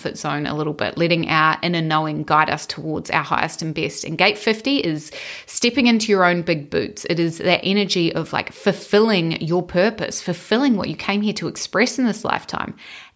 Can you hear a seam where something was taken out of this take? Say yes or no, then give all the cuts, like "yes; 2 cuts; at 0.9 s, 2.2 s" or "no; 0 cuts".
no; 0 cuts